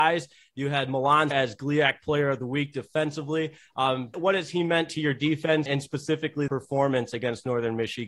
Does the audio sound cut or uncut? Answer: cut